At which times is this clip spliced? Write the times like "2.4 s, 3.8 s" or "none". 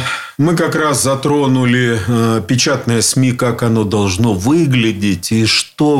none